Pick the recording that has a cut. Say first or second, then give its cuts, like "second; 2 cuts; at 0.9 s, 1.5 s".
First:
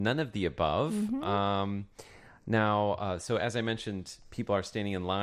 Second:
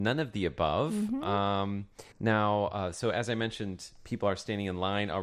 second; 1 cut; at 2.1 s